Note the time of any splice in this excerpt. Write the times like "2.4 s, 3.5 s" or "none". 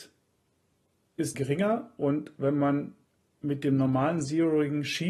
1.3 s